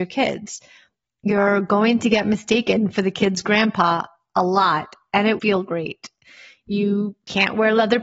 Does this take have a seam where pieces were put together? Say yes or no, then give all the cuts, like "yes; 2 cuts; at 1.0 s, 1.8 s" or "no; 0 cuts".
yes; 1 cut; at 5.4 s